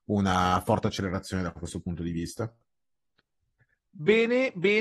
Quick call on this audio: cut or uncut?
uncut